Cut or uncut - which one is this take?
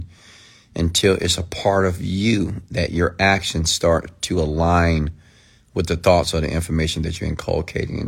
uncut